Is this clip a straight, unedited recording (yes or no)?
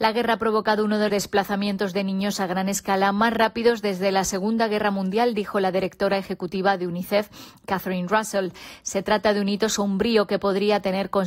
no